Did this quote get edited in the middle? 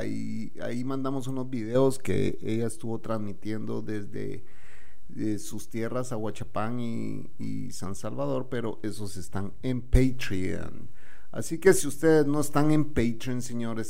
no; 0 cuts

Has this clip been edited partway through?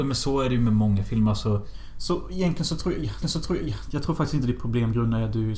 yes; 1 cut; at 3.2 s

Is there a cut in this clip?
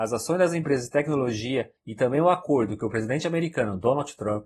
yes; 1 cut; at 1.8 s

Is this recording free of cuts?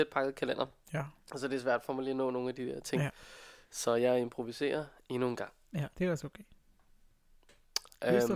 no; 1 cut; at 5.9 s

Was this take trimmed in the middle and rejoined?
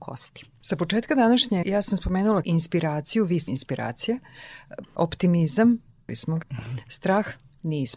yes; 6 cuts; at 1.6 s, 2.4 s, 3.5 s, 4.8 s, 6.1 s, 6.4 s

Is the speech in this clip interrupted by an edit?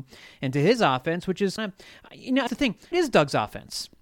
yes; 3 cuts; at 1.6 s, 2.5 s, 2.9 s

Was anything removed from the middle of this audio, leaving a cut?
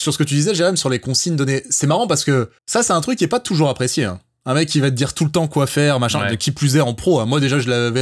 yes; 1 cut; at 2.6 s

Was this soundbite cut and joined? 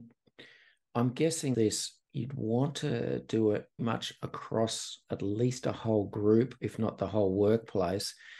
yes; 3 cuts; at 1.5 s, 2.0 s, 3.8 s

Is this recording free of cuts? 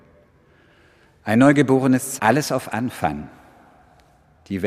no; 1 cut; at 2.2 s

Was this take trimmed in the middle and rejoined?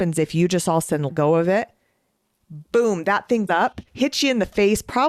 yes; 3 cuts; at 1.1 s, 3.5 s, 3.9 s

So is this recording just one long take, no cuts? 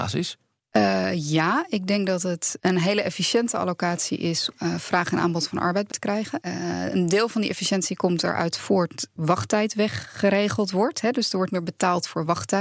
no; 4 cuts; at 4.5 s, 5.9 s, 9.2 s, 11.5 s

